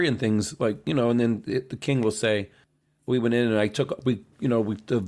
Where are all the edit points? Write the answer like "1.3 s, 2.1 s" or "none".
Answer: none